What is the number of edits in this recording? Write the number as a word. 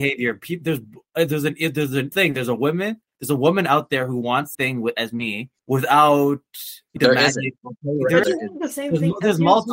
four